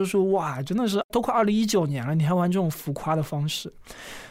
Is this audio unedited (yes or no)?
yes